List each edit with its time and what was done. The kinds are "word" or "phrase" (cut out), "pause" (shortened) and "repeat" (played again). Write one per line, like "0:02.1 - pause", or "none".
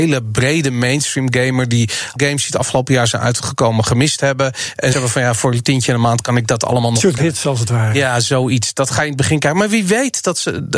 0:02.2 - word
0:04.9 - word
0:07.2 - word